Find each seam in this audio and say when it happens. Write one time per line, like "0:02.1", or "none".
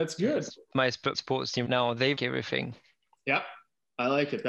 0:01.1
0:01.7
0:02.2